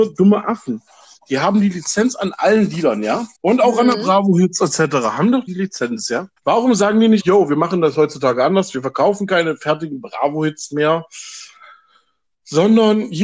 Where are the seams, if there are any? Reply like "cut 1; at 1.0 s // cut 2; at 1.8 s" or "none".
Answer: cut 1; at 3.3 s // cut 2; at 5.5 s // cut 3; at 6.4 s // cut 4; at 7.2 s